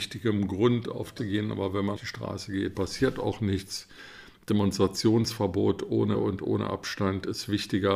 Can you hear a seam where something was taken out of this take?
yes; 4 cuts; at 1.2 s, 2.0 s, 2.7 s, 6.1 s

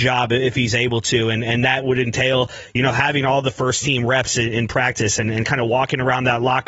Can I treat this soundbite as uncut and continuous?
yes; 0 cuts

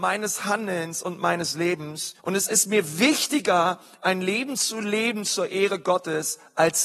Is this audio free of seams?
no; 1 cut; at 2.2 s

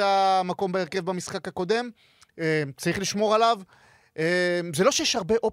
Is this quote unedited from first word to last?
yes; 0 cuts

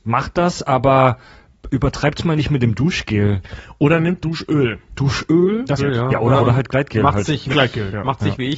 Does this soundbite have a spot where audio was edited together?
yes; 4 cuts; at 4.2 s, 5.8 s, 6.4 s, 7.5 s

